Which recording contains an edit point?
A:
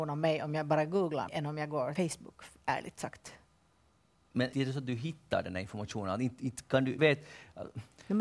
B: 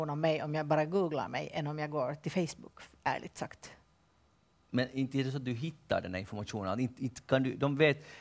A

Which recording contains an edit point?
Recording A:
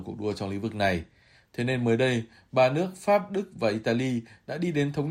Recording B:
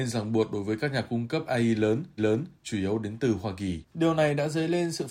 B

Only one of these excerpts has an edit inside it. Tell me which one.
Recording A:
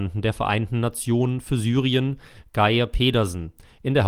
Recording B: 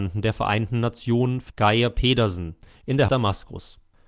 B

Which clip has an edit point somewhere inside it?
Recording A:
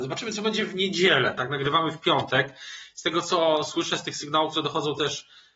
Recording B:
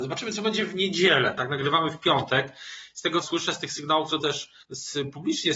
B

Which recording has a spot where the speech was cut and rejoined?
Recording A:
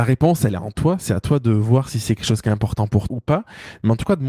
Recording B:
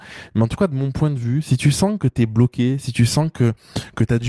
A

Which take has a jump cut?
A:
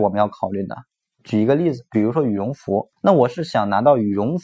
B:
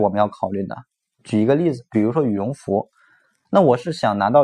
A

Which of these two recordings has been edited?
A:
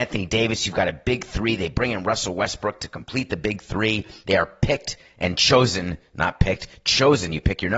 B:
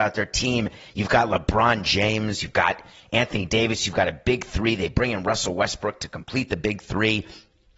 A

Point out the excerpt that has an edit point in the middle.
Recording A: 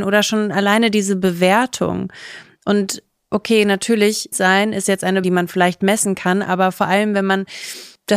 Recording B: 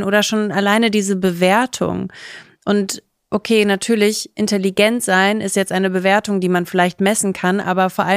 A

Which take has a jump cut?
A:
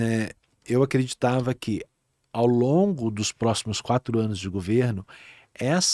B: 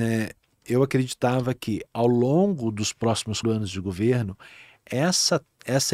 B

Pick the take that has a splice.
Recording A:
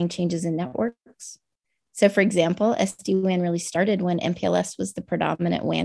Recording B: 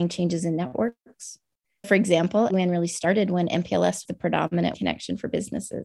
B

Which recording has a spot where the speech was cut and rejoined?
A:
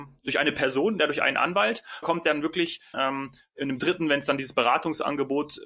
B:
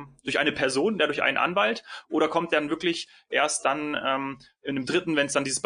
A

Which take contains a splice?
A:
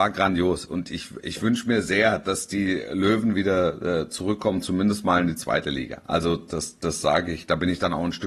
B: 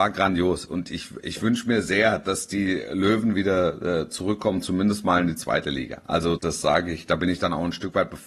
B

